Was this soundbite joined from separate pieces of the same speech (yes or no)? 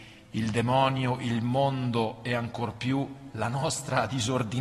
no